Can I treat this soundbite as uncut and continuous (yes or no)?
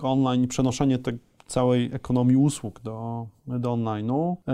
yes